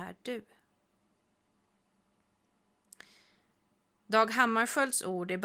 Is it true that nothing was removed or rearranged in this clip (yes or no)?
yes